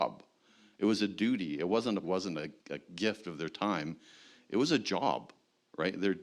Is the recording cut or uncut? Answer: cut